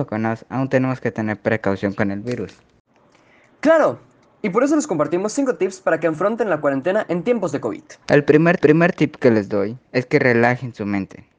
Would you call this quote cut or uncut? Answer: cut